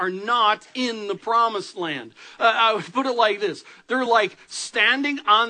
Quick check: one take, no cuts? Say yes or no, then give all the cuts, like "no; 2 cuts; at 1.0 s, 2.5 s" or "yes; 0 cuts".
yes; 0 cuts